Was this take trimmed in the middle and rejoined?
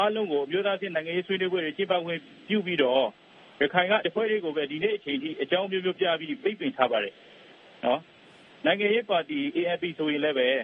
yes; 1 cut; at 4.0 s

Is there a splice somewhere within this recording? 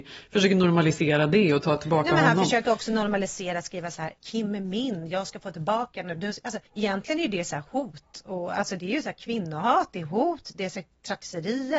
yes; 2 cuts; at 4.2 s, 6.7 s

